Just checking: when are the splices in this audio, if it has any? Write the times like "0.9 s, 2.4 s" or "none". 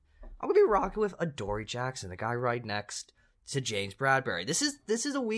none